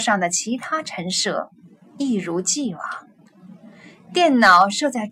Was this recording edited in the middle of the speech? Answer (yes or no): no